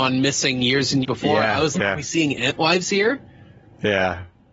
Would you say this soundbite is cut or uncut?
cut